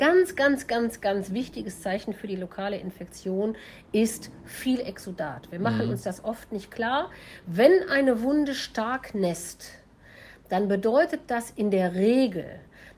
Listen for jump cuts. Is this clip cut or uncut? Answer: uncut